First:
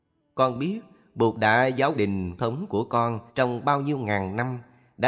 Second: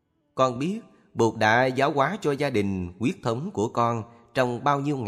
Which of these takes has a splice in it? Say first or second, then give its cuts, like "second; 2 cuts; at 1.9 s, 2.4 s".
first; 3 cuts; at 1.9 s, 2.4 s, 3.3 s